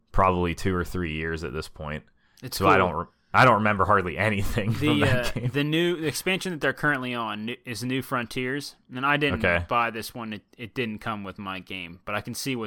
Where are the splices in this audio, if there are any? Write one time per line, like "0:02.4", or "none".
none